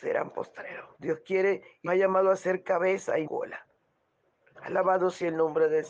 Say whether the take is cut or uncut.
cut